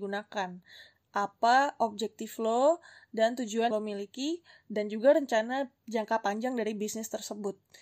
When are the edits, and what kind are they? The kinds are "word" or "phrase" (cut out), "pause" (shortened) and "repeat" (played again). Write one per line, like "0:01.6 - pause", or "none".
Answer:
0:03.7 - word

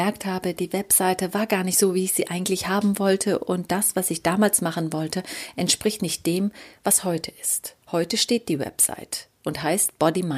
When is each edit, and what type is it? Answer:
0:07.8 - pause

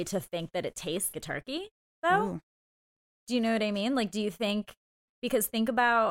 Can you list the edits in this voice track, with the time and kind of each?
0:01.1 - word

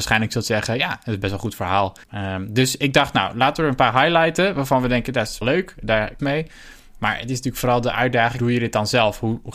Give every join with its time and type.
0:02.0 - pause
0:05.4 - word
0:06.2 - phrase
0:08.4 - word

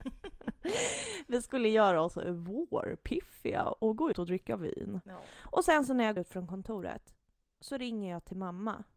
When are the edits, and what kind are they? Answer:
0:04.1 - word
0:06.2 - word

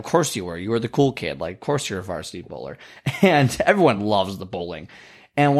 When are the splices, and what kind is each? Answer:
none

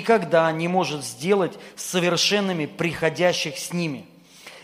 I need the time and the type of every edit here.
none

